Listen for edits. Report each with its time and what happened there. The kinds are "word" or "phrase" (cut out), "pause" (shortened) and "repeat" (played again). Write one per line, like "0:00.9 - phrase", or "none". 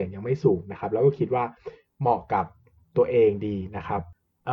none